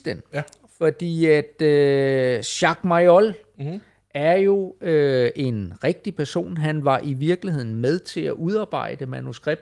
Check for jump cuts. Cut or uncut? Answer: uncut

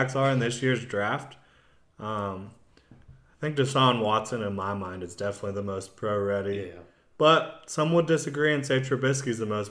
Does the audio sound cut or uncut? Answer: uncut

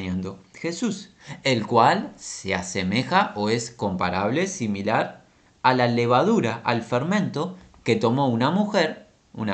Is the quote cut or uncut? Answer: uncut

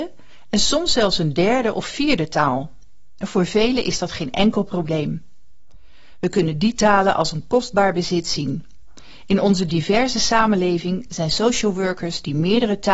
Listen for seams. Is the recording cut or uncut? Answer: uncut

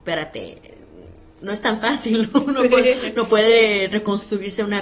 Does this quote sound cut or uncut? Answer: uncut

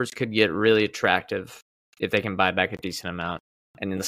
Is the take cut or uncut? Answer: uncut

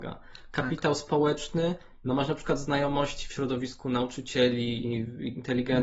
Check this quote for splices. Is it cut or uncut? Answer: uncut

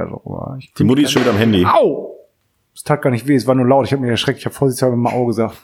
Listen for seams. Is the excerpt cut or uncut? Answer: uncut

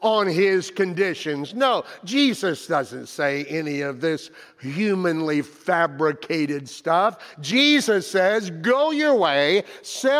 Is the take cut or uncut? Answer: uncut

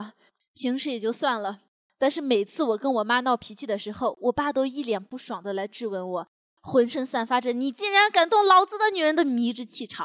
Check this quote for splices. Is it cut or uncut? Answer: uncut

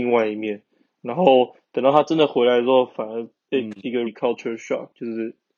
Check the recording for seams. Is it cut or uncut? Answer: cut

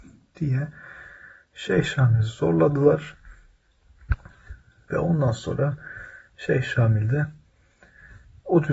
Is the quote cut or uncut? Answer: uncut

